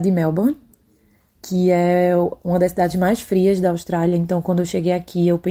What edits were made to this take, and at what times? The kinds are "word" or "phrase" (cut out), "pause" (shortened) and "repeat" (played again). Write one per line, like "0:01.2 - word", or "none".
none